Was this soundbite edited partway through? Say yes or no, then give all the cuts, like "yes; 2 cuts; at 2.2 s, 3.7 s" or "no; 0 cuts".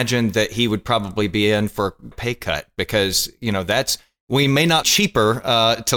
yes; 2 cuts; at 2.1 s, 4.8 s